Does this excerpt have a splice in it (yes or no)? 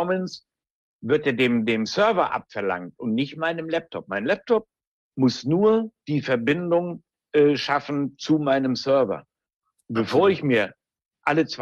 no